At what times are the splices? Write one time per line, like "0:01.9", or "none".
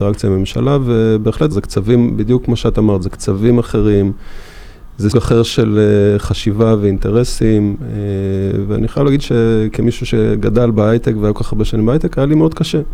0:01.5
0:05.1